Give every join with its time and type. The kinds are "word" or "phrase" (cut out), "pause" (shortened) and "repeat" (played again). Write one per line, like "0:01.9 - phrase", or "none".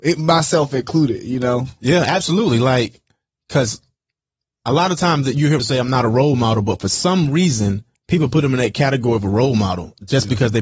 0:05.6 - word